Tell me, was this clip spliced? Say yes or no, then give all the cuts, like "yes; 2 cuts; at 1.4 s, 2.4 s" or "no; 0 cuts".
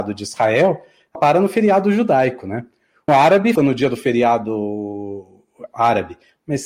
yes; 3 cuts; at 1.2 s, 3.1 s, 3.6 s